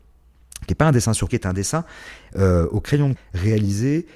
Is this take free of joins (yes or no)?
no